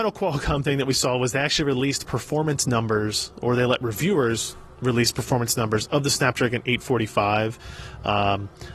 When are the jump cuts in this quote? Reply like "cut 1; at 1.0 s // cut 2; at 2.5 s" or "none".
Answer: none